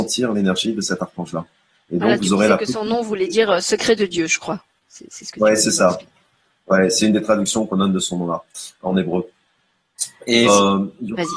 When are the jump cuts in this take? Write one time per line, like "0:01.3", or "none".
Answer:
0:10.4